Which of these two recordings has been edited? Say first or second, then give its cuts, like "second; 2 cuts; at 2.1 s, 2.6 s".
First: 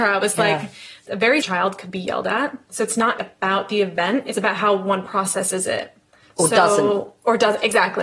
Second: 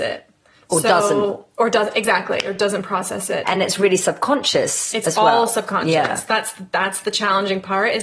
first; 2 cuts; at 1.4 s, 3.2 s